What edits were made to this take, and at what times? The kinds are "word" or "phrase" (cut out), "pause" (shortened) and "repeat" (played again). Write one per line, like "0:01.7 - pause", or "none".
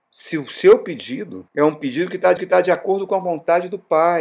0:01.5 - pause
0:02.4 - repeat